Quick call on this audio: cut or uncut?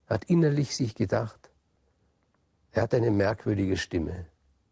uncut